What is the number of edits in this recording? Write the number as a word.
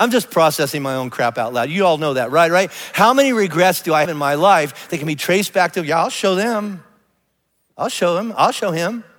one